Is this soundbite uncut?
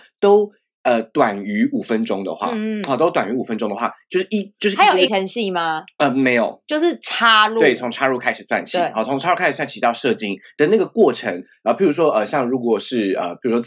no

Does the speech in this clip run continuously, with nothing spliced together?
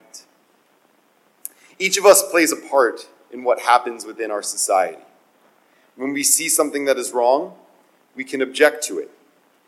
yes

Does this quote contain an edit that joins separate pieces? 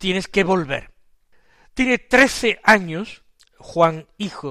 no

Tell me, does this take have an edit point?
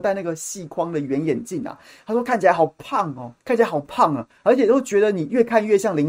yes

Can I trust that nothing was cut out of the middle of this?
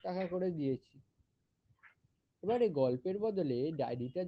yes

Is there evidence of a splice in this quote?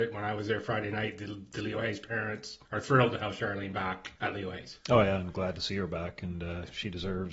yes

